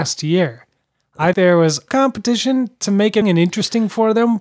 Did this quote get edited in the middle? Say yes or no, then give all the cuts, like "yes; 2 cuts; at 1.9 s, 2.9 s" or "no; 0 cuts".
yes; 3 cuts; at 1.3 s, 1.9 s, 3.2 s